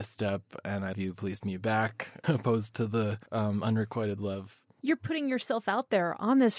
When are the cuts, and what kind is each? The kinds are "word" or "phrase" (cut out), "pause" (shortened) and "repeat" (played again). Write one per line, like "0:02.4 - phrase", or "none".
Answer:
0:00.9 - word
0:01.4 - word
0:02.2 - word
0:03.3 - pause

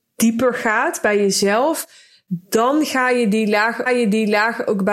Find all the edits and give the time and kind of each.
0:03.9 - repeat

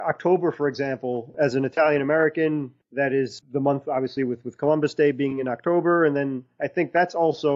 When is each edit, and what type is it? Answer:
none

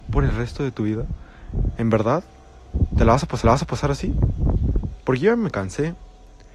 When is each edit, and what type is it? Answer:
0:03.4 - repeat

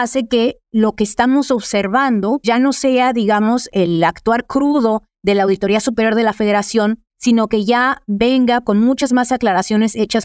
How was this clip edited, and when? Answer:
0:02.4 - word
0:07.1 - pause
0:08.6 - word

